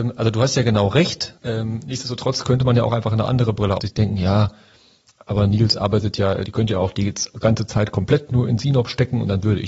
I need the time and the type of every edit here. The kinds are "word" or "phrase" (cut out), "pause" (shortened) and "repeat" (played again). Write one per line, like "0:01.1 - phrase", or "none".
0:01.4 - pause
0:03.8 - phrase
0:06.4 - word

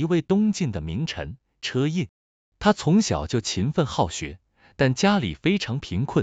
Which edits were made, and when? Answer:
none

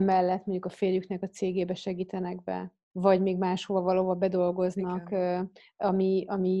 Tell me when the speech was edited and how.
none

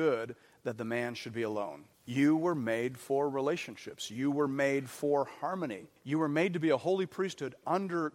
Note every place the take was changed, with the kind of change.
0:01.9 - pause
0:06.0 - pause

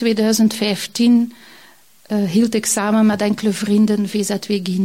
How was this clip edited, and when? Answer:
none

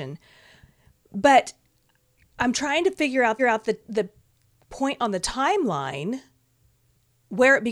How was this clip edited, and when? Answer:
0:03.4 - repeat

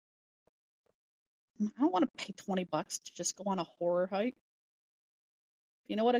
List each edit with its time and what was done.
none

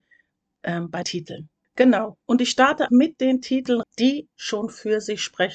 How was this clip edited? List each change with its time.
0:01.0 - word
0:02.9 - word
0:03.8 - word
0:04.3 - word

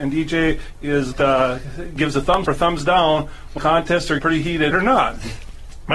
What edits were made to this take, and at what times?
0:01.1 - phrase
0:02.5 - word
0:03.6 - word
0:04.2 - word
0:04.7 - phrase

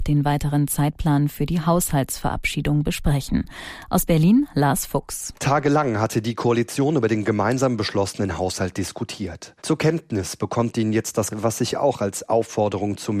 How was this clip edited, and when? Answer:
0:09.6 - pause
0:11.3 - word

